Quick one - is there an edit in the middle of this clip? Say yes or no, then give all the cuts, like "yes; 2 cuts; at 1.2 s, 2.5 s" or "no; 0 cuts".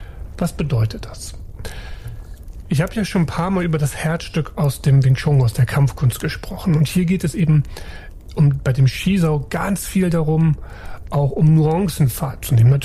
no; 0 cuts